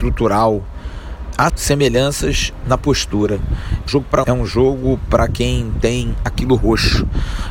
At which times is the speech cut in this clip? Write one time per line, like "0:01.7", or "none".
0:01.5
0:03.9
0:04.2